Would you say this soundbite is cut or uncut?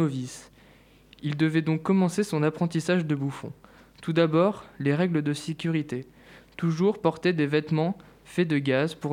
uncut